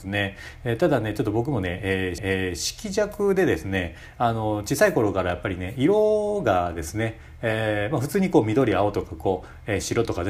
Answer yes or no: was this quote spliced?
yes